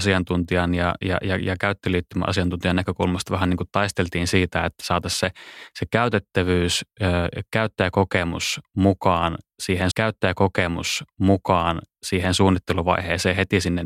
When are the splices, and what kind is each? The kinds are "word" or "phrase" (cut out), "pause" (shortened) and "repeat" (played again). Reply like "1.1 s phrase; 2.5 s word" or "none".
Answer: 9.9 s repeat

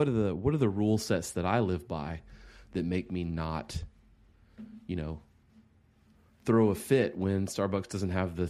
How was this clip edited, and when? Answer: none

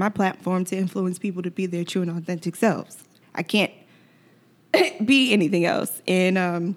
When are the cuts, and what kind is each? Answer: none

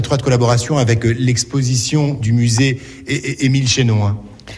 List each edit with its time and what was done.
2.2 s word

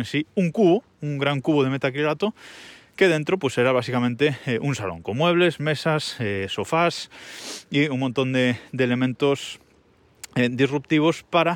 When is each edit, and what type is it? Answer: none

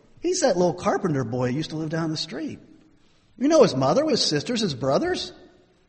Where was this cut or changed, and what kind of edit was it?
4.1 s word

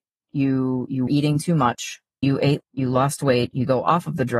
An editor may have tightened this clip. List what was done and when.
1.1 s word; 2.2 s word; 2.6 s word

